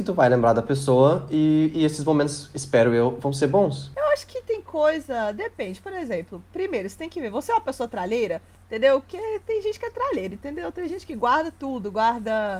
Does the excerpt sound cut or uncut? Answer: uncut